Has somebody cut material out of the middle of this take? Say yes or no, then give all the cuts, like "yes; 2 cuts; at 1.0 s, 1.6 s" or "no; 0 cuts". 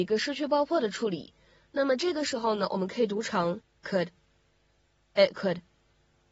yes; 1 cut; at 3.8 s